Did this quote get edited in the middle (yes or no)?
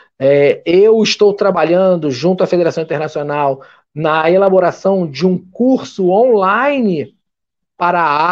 no